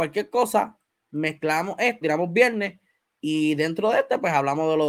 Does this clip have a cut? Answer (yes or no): yes